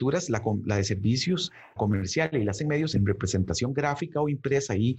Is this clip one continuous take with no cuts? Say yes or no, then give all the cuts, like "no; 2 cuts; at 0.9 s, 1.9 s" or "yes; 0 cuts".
no; 3 cuts; at 1.8 s, 2.6 s, 2.9 s